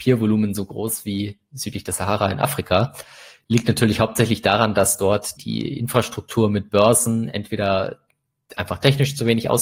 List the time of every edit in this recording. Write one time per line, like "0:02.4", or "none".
0:05.4